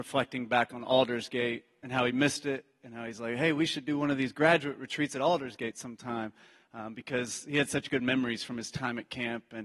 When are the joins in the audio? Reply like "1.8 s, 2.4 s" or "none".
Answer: none